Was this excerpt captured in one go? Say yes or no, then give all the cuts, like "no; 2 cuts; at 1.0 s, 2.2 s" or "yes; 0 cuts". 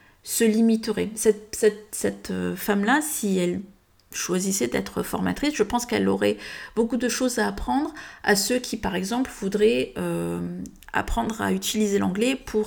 yes; 0 cuts